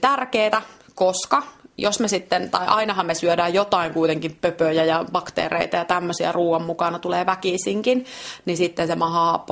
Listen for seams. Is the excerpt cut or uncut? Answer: uncut